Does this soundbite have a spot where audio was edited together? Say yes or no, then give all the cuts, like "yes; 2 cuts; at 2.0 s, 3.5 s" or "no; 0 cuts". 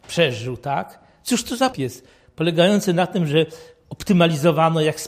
yes; 1 cut; at 1.7 s